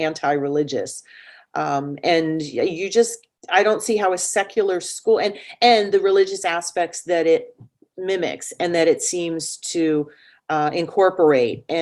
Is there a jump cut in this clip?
no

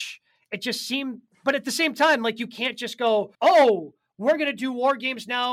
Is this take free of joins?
no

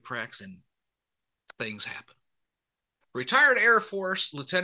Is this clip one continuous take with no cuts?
yes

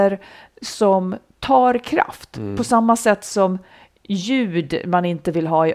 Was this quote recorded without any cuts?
yes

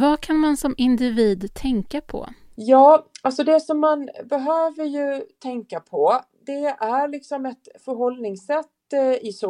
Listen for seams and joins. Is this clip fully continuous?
yes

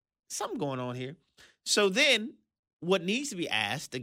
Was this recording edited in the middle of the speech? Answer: no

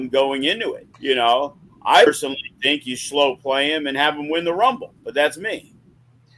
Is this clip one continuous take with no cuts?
no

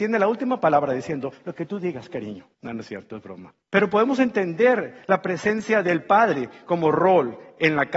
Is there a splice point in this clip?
yes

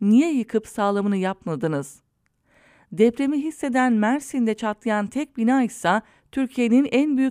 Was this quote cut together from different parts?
no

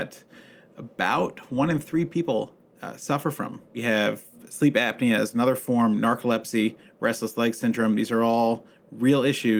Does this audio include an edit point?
no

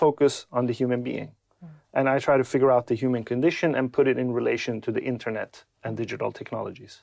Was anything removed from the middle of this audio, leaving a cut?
no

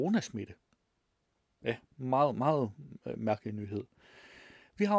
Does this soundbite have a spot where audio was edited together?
no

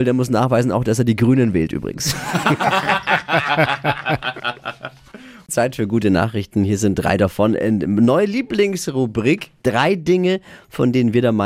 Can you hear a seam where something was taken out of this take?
no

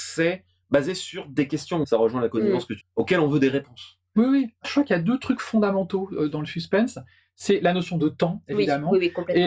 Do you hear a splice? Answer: yes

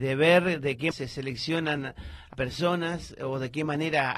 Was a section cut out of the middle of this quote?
yes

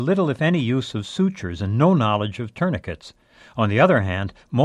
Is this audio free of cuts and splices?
yes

